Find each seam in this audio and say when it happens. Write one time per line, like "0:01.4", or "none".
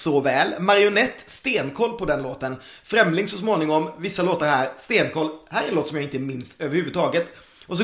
none